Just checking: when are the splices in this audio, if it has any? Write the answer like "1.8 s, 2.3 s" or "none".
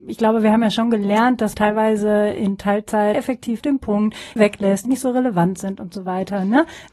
1.5 s, 3.1 s, 3.6 s, 4.4 s, 4.8 s